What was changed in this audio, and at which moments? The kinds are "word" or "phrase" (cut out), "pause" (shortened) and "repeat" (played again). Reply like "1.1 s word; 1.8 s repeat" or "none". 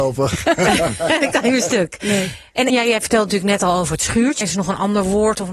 2.7 s word; 4.4 s word